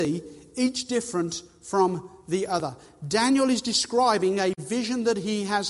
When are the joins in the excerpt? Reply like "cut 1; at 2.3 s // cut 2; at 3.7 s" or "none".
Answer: none